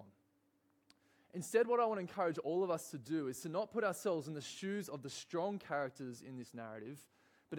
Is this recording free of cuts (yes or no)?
yes